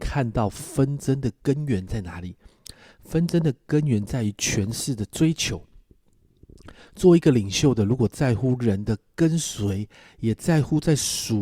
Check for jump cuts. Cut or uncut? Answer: uncut